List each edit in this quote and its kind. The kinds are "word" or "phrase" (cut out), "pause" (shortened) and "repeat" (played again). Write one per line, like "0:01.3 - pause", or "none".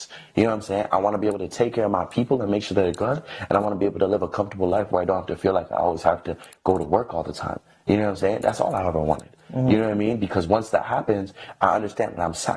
none